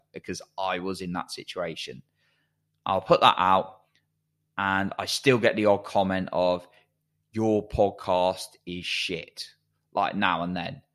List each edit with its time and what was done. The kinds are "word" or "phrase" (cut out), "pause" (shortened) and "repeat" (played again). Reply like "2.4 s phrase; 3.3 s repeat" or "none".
none